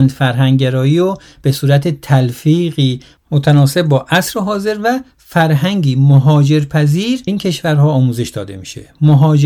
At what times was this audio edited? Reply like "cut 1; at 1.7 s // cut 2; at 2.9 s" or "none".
cut 1; at 7.3 s